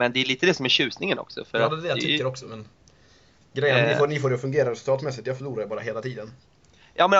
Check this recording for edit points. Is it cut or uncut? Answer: uncut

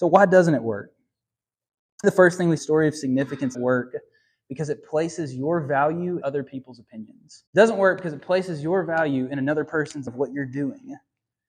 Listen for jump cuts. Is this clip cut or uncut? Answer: cut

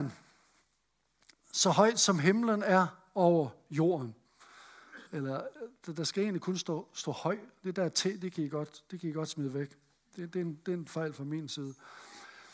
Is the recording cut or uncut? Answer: cut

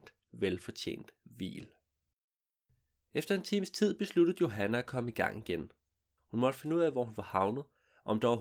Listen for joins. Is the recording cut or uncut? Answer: cut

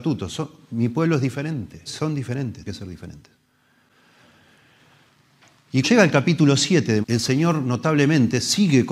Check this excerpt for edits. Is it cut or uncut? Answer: cut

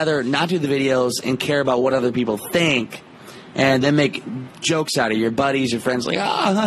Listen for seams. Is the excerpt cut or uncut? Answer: uncut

